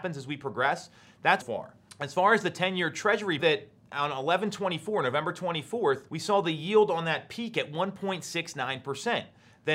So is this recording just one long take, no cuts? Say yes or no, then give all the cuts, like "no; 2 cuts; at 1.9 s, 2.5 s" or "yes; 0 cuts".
no; 4 cuts; at 1.4 s, 3.4 s, 3.8 s, 6.1 s